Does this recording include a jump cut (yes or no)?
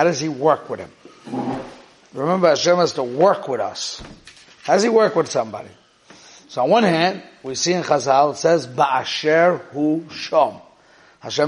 no